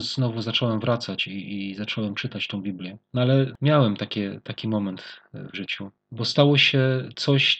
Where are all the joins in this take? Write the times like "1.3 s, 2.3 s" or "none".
3.0 s, 5.5 s